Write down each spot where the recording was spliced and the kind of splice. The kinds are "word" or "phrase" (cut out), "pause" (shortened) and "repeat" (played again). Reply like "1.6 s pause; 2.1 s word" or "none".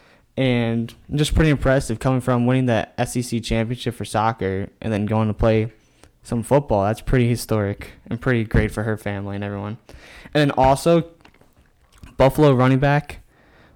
none